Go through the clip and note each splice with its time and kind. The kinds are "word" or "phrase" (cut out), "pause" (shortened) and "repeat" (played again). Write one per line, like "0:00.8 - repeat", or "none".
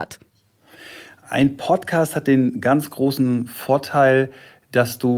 none